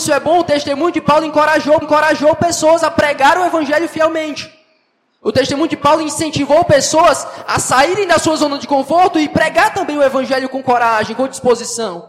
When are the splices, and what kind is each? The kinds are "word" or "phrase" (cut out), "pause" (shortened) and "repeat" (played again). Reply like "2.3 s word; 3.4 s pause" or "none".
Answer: 1.8 s repeat